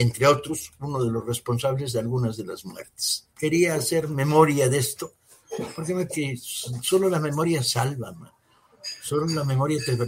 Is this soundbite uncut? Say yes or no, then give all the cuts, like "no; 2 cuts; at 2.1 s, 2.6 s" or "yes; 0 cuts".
no; 2 cuts; at 3.3 s, 6.1 s